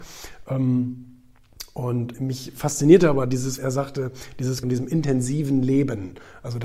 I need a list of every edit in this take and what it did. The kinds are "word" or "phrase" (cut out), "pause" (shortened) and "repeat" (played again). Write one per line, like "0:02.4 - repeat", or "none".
0:02.1 - word
0:03.6 - word
0:04.6 - phrase

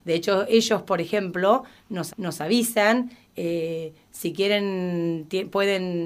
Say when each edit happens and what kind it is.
0:02.1 - repeat

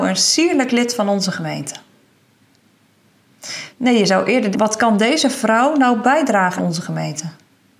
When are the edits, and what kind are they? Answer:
0:03.7 - pause
0:04.5 - word
0:06.6 - word

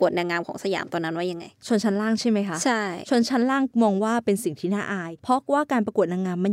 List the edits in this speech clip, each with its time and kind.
0:05.2 - pause

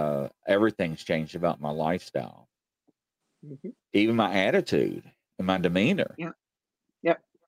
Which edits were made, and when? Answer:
none

